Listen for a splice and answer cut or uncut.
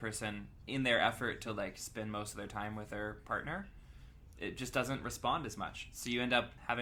uncut